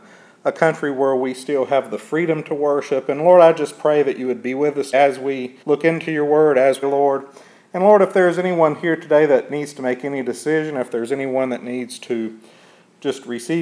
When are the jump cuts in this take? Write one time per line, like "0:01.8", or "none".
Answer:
0:04.9
0:05.6
0:06.8